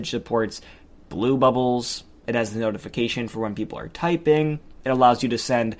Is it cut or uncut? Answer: uncut